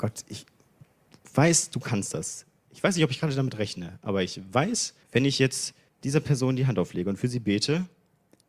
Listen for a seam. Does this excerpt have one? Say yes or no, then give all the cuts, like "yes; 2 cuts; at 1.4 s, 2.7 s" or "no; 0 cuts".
yes; 2 cuts; at 5.0 s, 5.9 s